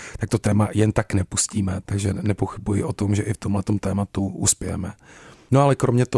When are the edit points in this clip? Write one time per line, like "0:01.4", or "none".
0:01.8